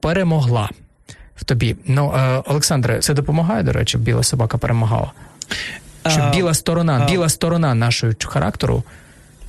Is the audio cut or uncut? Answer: cut